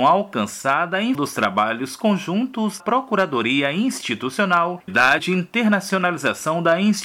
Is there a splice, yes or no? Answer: yes